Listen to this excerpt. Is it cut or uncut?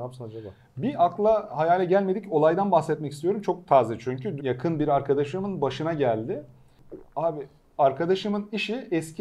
cut